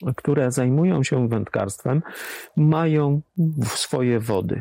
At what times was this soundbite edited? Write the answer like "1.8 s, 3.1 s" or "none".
none